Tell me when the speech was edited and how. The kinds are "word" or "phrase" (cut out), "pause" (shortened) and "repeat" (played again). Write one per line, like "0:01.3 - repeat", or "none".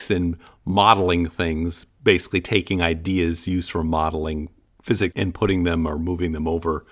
0:05.1 - word